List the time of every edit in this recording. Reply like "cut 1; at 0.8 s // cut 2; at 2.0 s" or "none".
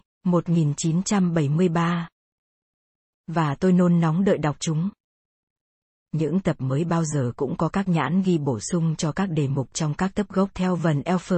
none